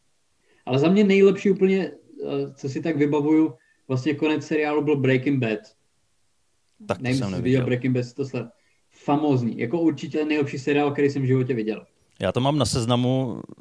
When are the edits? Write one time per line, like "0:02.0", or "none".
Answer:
0:10.1